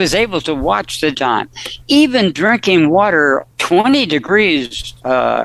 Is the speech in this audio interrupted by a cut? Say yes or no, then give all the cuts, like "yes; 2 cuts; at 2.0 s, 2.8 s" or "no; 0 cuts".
yes; 3 cuts; at 1.1 s, 1.8 s, 3.5 s